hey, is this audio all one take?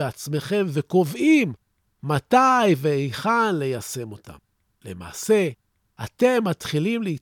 yes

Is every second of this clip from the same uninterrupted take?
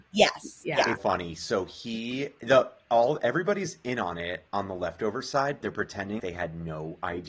no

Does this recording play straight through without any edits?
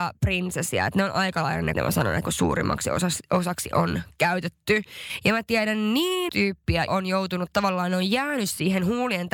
no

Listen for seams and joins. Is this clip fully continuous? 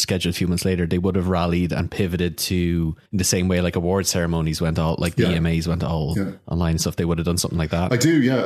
no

